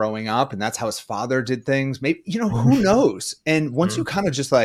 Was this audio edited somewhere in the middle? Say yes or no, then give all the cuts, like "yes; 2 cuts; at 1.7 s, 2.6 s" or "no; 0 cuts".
no; 0 cuts